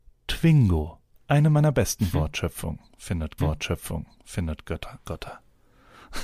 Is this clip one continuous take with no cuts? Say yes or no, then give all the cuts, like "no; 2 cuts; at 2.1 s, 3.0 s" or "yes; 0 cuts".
no; 2 cuts; at 1.1 s, 3.4 s